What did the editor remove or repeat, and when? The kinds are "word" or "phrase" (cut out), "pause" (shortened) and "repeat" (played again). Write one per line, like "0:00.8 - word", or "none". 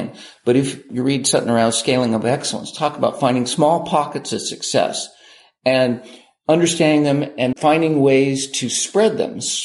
0:07.5 - word